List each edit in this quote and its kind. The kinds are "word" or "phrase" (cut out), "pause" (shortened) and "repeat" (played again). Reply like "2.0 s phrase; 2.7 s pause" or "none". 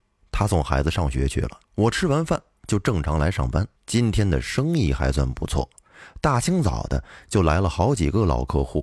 1.6 s pause; 3.8 s pause

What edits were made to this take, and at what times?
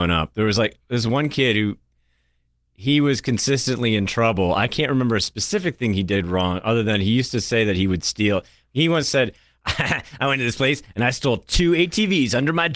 none

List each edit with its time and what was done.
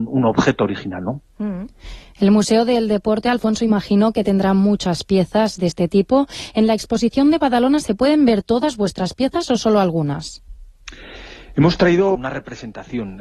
12.1 s word

